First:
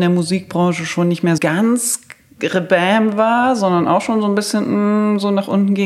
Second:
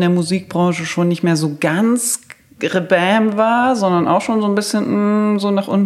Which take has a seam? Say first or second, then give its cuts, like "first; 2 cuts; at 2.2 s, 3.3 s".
first; 1 cut; at 1.4 s